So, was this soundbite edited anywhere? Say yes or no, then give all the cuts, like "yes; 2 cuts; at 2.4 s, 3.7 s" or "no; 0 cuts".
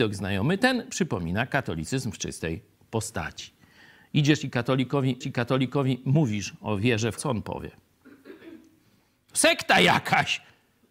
yes; 2 cuts; at 5.2 s, 7.2 s